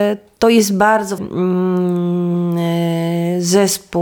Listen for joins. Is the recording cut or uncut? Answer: cut